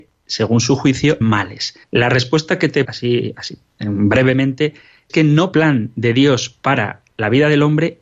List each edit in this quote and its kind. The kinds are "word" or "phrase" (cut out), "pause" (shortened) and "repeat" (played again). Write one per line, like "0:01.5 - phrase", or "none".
0:01.2 - word
0:01.8 - pause
0:02.8 - phrase
0:05.1 - word
0:05.5 - phrase